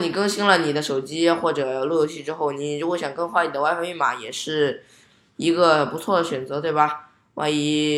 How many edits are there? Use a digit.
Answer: 0